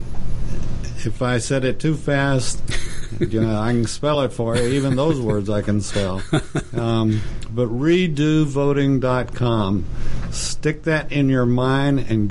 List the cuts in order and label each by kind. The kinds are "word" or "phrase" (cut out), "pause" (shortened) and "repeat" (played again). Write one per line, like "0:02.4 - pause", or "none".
none